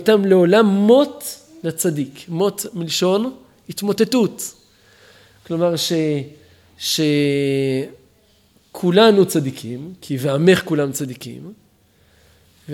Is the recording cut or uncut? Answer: uncut